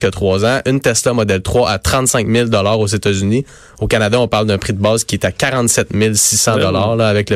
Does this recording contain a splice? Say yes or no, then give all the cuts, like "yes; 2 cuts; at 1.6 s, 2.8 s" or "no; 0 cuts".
no; 0 cuts